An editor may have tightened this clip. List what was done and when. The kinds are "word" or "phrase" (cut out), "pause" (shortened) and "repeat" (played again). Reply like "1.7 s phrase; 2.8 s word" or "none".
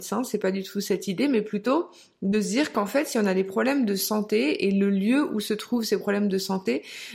none